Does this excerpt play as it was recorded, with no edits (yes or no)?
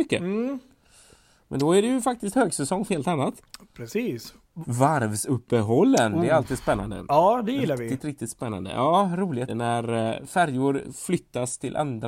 no